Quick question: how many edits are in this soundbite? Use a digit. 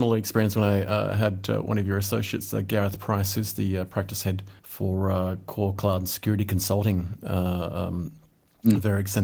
1